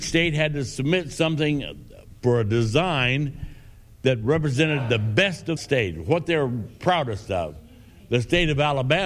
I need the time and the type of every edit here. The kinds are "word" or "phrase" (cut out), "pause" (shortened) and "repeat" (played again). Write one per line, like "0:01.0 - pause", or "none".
0:05.6 - word